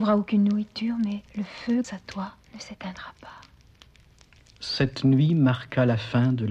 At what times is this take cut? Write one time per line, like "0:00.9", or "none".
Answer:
0:01.3
0:01.8
0:02.4
0:03.9